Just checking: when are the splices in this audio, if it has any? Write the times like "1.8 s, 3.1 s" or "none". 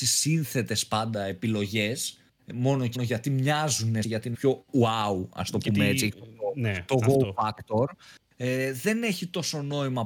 2.3 s, 2.9 s, 4.0 s, 4.3 s